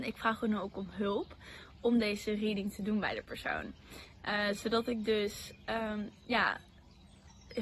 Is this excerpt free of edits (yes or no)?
yes